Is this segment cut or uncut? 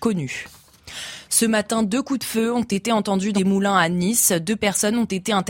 cut